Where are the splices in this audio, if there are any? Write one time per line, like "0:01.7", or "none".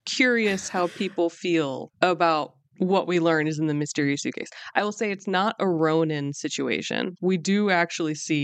0:01.9